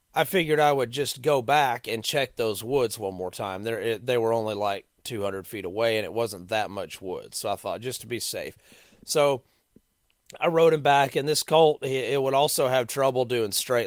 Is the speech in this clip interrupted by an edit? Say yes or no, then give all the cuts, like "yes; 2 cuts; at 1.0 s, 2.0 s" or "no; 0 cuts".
no; 0 cuts